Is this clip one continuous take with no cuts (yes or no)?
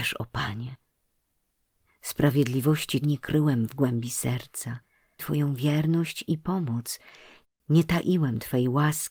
no